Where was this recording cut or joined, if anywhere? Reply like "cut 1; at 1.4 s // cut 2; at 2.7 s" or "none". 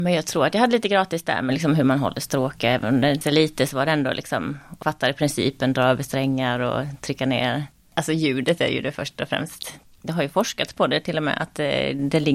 cut 1; at 3.2 s // cut 2; at 4.8 s